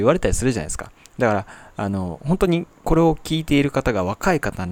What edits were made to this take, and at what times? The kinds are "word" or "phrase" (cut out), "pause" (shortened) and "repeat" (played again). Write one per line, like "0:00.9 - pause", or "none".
none